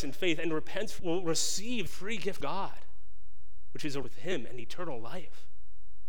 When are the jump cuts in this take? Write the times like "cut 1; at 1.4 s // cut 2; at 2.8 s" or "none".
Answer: cut 1; at 1.0 s // cut 2; at 1.9 s // cut 3; at 2.4 s // cut 4; at 4.0 s